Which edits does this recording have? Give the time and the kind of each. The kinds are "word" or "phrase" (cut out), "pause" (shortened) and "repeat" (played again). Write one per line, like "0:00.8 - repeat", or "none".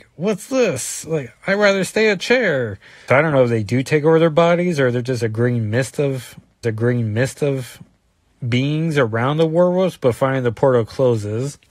0:03.1 - word
0:06.6 - repeat

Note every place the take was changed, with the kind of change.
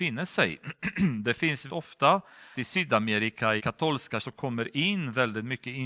0:01.7 - word
0:02.5 - word
0:03.6 - word
0:04.2 - word

